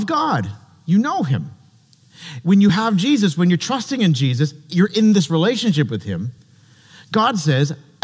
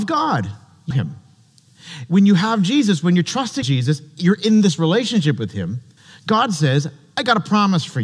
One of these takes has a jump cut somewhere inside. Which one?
second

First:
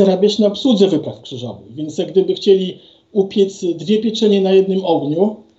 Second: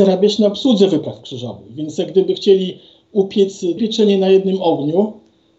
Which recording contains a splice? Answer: second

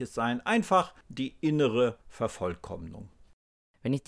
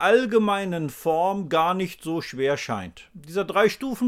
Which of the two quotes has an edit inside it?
first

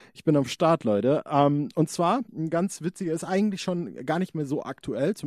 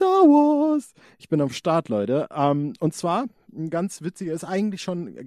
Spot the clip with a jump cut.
first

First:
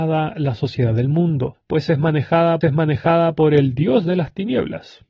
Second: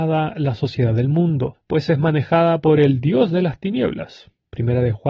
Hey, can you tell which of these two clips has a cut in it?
first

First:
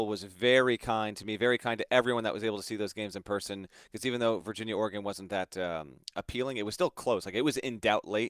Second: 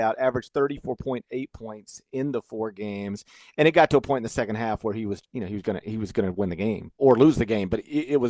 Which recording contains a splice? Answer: second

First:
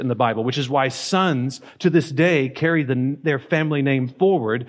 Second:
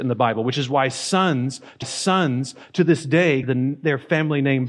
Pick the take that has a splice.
second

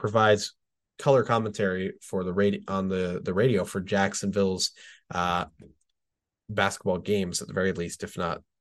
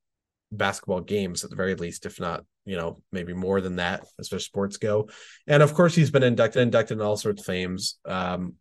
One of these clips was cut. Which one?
second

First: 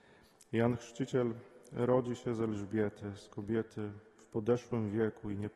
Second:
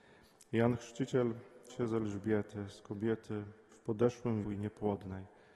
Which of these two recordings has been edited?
second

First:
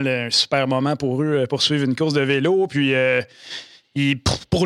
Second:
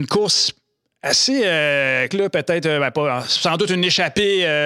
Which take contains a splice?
second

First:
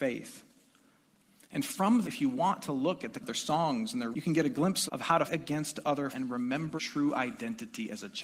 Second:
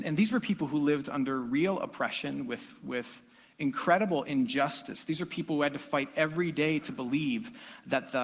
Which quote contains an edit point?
first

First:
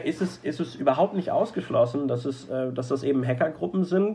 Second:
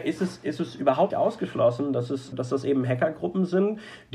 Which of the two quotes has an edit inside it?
second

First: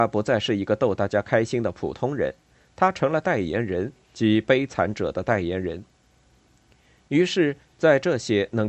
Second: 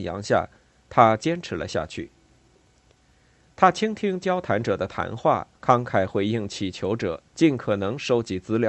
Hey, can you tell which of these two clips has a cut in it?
second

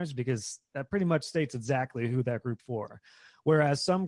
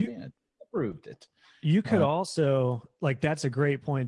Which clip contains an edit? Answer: first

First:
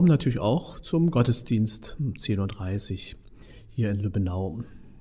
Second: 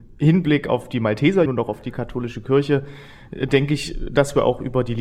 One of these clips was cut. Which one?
second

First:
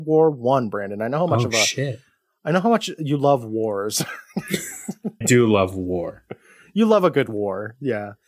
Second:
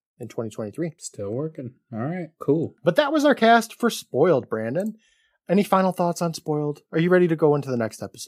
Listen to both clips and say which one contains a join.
first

